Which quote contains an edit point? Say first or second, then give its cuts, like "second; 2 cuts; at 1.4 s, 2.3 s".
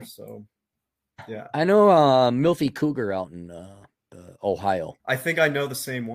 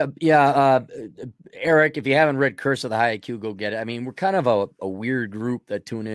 first; 2 cuts; at 4.0 s, 5.0 s